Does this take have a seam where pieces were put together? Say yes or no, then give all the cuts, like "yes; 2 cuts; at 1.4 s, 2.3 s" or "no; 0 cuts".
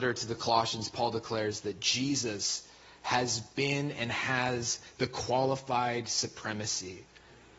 no; 0 cuts